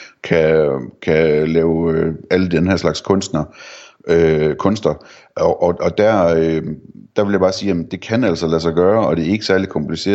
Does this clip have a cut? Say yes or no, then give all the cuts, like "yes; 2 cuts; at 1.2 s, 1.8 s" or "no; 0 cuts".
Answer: no; 0 cuts